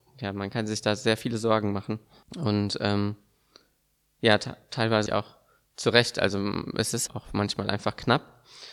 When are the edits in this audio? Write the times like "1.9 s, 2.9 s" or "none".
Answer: 2.2 s, 5.1 s, 7.1 s